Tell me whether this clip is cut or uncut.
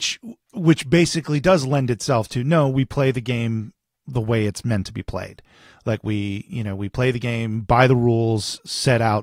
uncut